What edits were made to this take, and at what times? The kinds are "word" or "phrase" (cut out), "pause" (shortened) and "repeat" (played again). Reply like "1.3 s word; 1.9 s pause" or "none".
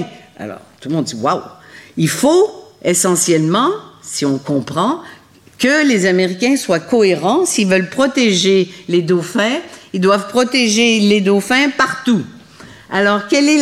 none